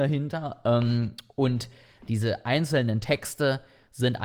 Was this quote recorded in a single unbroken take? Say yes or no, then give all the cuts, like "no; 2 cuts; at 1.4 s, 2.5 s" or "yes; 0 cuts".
yes; 0 cuts